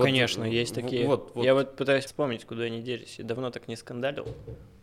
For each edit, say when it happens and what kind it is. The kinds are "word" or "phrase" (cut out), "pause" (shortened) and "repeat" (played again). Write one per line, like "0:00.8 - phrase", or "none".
0:02.1 - word